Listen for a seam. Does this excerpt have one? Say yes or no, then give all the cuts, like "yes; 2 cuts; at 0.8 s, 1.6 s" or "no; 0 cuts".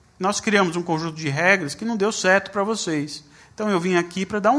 no; 0 cuts